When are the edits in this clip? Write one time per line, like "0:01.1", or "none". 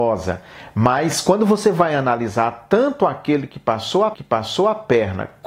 0:04.1